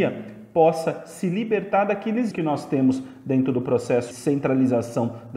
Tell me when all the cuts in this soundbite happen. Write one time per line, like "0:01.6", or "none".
0:02.3
0:04.1

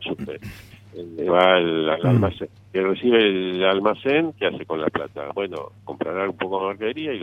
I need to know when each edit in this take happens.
0:05.8

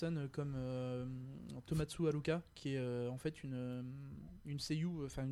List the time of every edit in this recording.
none

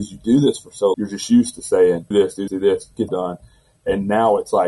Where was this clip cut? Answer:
0:00.9
0:02.1
0:02.5
0:03.1

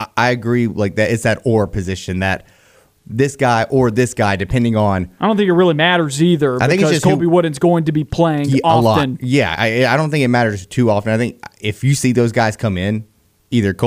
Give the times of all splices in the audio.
none

